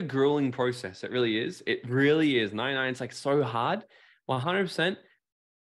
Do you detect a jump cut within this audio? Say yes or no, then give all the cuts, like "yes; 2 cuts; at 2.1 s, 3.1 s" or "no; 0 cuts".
no; 0 cuts